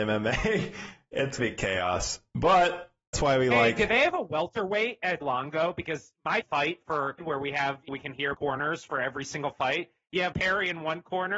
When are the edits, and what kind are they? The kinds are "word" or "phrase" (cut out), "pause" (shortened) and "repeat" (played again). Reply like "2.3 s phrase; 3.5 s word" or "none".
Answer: 1.4 s word; 3.1 s word; 5.2 s word; 6.4 s word; 7.2 s word; 7.9 s word; 8.3 s word; 10.3 s word

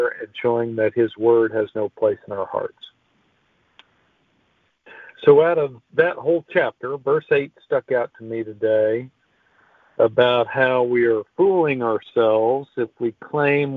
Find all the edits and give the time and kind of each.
none

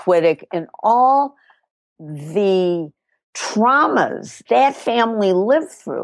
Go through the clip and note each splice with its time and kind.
4.4 s word

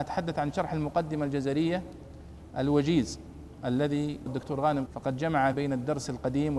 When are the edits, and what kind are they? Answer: 4.3 s word; 4.9 s word; 5.5 s word

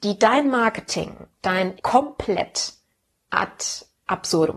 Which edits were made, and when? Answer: 1.8 s word

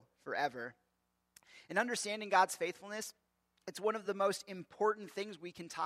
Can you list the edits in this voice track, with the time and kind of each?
none

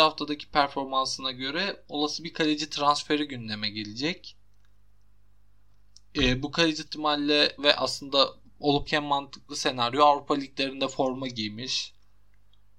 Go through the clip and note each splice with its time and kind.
6.9 s phrase; 7.6 s phrase; 8.9 s word

